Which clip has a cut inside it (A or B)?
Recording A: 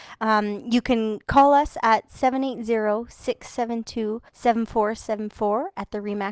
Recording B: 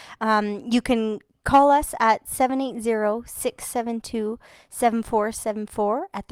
A